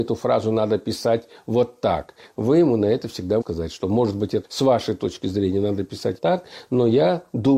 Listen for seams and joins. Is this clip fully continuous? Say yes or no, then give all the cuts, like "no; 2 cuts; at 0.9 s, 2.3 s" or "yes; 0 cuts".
no; 3 cuts; at 3.4 s, 4.4 s, 6.2 s